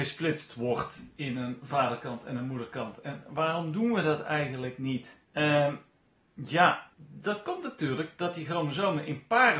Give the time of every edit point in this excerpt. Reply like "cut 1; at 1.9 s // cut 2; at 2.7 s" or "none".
cut 1; at 5.2 s // cut 2; at 6.9 s